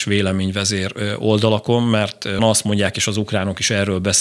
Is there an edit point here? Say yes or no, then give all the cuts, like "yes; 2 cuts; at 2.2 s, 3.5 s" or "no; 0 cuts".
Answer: yes; 1 cut; at 2.4 s